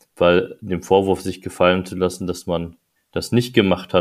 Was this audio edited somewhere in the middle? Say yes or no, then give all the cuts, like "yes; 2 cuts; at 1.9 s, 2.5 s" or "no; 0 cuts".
yes; 1 cut; at 3.0 s